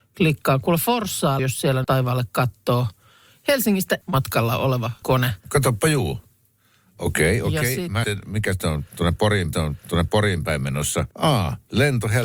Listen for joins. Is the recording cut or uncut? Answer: cut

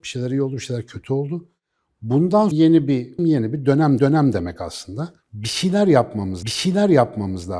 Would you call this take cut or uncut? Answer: cut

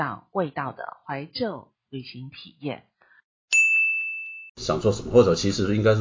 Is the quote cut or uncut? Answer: cut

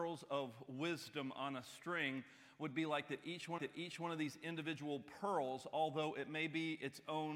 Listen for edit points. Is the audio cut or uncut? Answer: cut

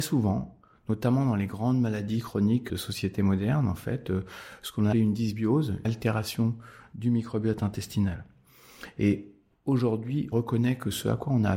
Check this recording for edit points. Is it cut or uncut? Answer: cut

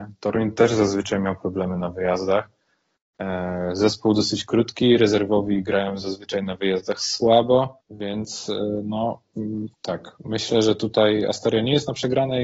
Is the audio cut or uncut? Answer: cut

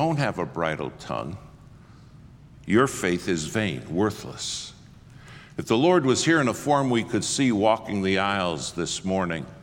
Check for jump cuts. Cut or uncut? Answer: uncut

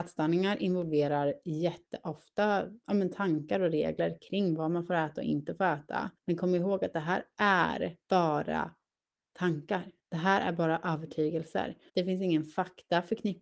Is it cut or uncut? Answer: cut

